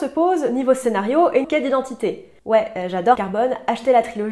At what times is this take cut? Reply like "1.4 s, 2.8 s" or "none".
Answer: 1.4 s, 2.4 s, 3.2 s